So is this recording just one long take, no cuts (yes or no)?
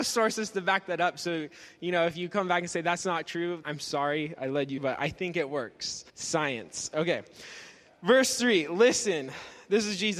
no